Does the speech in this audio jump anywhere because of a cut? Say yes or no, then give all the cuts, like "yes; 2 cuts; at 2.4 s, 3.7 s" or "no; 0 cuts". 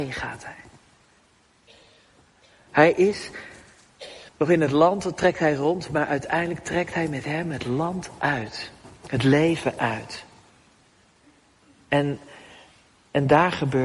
yes; 1 cut; at 4.3 s